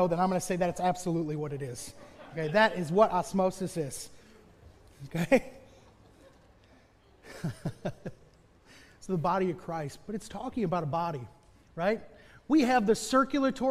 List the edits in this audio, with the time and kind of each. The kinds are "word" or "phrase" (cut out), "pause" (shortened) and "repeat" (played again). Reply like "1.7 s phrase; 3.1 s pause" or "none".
none